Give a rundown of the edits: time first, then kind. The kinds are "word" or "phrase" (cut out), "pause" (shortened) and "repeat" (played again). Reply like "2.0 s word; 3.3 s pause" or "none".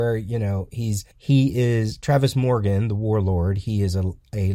1.1 s pause

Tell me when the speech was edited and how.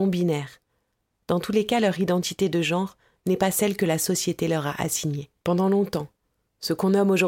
5.4 s pause

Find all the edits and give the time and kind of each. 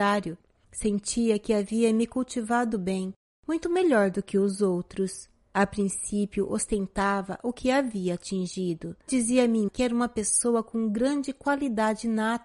2.7 s word; 9.1 s word; 9.7 s word

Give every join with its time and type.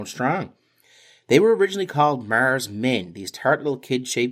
none

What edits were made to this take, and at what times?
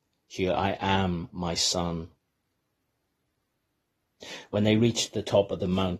none

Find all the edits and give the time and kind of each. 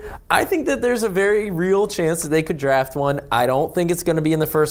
none

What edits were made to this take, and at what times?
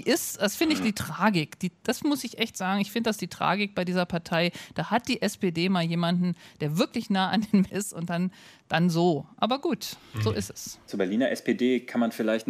7.7 s word

